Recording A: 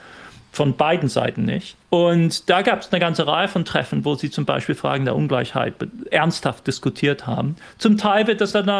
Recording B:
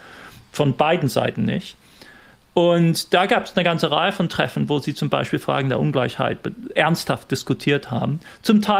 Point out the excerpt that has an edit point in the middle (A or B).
A